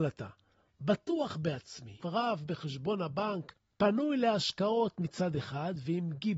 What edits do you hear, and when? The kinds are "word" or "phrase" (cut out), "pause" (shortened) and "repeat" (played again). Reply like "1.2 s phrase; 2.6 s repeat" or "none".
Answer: 2.0 s phrase